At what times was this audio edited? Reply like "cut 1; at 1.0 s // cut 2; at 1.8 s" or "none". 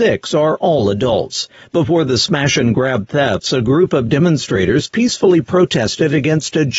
none